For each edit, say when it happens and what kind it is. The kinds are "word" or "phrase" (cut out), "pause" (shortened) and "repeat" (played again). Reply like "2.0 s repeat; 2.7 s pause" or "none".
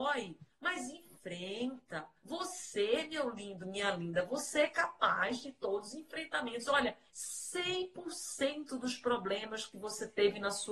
2.2 s pause; 7.1 s pause

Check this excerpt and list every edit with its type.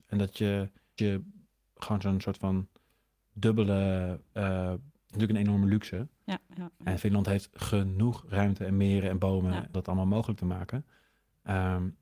1.0 s word; 5.1 s word; 9.7 s word

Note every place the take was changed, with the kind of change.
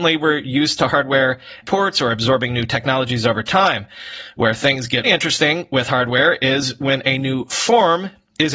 1.6 s word; 5.0 s word

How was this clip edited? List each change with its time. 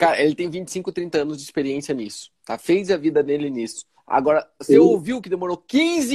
4.0 s pause

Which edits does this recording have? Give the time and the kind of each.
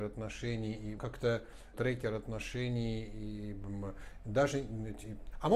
1.0 s phrase; 1.7 s word

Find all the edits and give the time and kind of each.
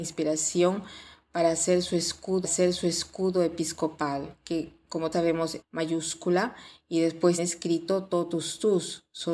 2.4 s repeat; 5.1 s word; 5.6 s phrase; 7.4 s word

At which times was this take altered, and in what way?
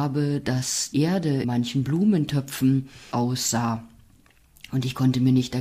0.9 s word; 1.4 s word; 3.1 s phrase

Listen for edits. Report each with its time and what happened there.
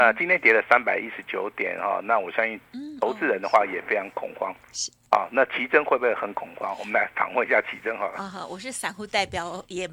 5.1 s pause

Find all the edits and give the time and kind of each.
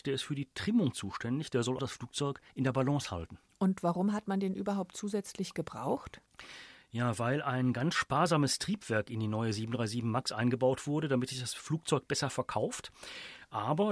1.8 s word; 2.5 s pause

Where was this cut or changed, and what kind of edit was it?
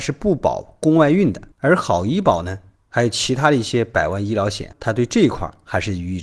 1.5 s pause; 4.7 s word

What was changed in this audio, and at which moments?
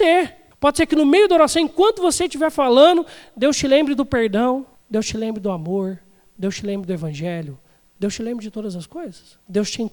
none

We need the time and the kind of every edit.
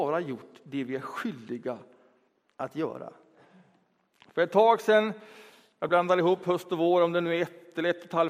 none

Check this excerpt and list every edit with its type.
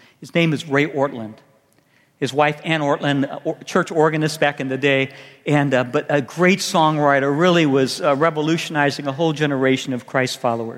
none

